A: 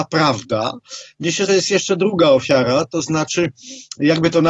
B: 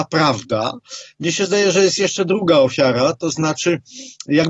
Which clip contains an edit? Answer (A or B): A